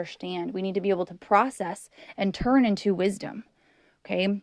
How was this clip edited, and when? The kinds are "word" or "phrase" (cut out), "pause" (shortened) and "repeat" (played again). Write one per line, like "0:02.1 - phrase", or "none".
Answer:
none